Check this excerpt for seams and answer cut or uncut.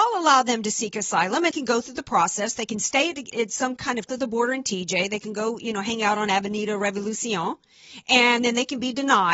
cut